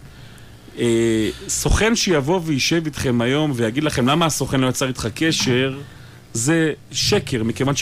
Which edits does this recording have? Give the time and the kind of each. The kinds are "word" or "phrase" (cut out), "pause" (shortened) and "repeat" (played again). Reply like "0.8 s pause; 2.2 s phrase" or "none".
none